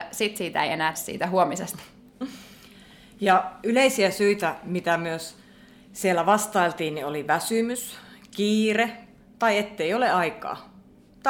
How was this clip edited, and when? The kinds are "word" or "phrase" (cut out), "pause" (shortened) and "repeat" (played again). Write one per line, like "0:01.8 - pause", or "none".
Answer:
0:00.9 - word